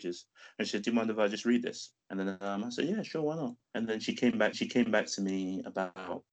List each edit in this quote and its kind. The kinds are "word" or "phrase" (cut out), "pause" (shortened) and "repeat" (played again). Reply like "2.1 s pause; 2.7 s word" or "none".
2.0 s pause; 3.6 s pause; 4.5 s repeat